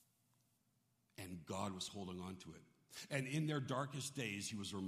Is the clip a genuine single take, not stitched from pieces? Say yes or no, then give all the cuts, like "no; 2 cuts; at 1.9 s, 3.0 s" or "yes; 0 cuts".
yes; 0 cuts